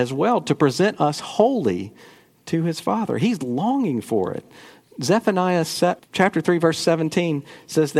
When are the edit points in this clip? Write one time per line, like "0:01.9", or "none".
0:06.0